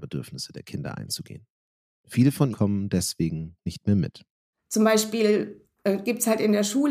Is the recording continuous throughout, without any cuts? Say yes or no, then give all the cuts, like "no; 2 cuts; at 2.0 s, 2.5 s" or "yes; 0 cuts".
no; 1 cut; at 2.5 s